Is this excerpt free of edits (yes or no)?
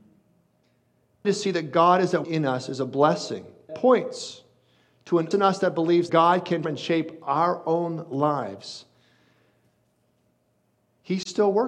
no